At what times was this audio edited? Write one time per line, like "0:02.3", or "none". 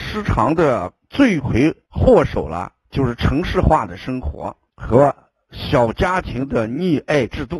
0:01.9
0:04.7